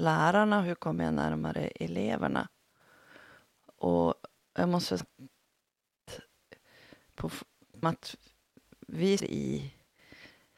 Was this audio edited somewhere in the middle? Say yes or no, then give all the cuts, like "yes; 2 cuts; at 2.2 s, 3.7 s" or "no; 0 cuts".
yes; 3 cuts; at 5.0 s, 7.8 s, 9.2 s